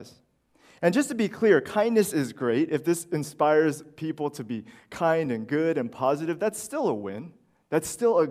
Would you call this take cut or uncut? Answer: uncut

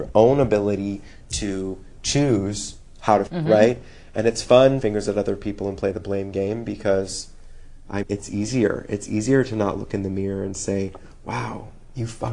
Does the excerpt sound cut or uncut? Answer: cut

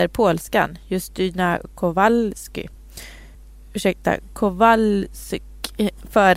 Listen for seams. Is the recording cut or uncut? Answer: cut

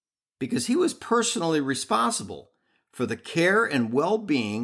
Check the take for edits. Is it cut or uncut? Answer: uncut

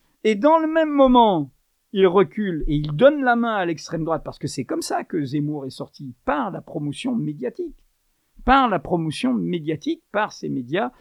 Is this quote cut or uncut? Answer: uncut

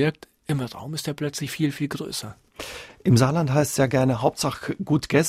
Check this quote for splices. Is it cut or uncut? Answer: uncut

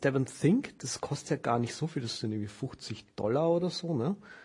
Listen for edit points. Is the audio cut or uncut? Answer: uncut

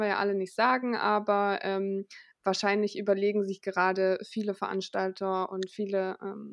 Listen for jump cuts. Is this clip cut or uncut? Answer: uncut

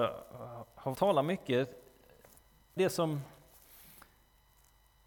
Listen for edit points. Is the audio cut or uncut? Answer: cut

